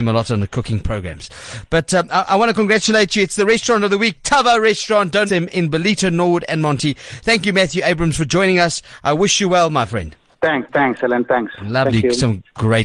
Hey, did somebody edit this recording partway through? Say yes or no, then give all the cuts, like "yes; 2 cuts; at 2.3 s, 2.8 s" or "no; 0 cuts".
yes; 2 cuts; at 5.3 s, 10.3 s